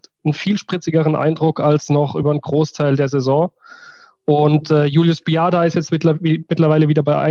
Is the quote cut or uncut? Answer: uncut